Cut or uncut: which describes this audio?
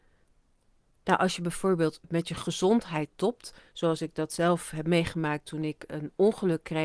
uncut